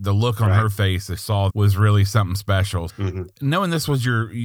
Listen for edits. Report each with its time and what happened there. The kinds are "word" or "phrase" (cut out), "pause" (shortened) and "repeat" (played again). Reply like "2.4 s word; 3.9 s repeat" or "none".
1.2 s word; 1.5 s word; 2.9 s word